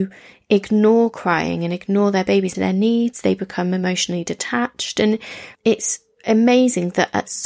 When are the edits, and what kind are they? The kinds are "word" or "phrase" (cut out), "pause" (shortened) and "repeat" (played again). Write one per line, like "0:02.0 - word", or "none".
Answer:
0:02.5 - phrase
0:05.5 - pause